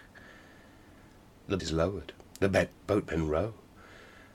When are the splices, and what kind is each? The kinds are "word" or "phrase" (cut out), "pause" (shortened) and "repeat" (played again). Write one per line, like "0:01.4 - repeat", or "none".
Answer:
0:01.6 - word